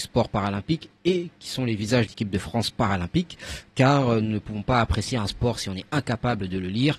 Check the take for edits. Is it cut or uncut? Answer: cut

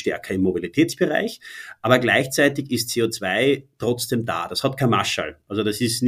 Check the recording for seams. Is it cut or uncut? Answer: uncut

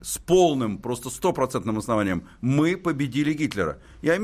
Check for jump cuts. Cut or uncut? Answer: uncut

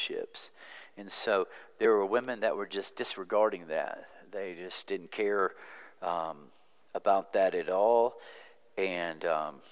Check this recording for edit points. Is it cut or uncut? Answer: uncut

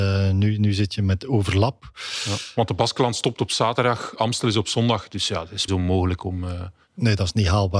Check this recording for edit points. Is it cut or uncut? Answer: cut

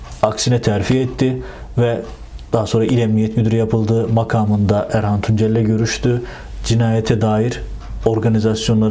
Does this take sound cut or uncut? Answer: uncut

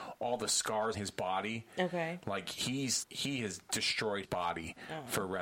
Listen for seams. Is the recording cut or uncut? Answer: cut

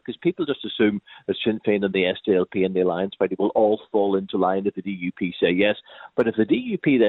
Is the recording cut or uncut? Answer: uncut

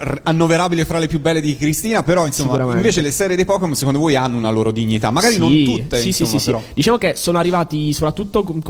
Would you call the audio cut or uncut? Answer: uncut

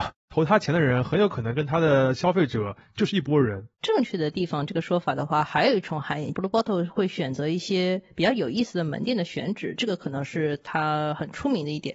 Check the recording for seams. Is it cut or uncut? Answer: cut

